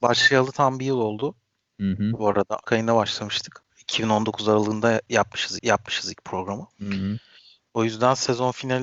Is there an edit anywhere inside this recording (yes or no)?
yes